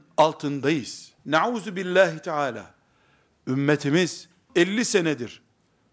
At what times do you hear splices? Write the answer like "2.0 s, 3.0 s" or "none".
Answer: 1.2 s, 4.5 s